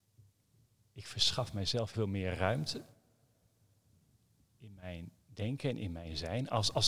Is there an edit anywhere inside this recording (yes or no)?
yes